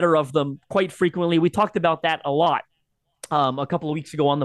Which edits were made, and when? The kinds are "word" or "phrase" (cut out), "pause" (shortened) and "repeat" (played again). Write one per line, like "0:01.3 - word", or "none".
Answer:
none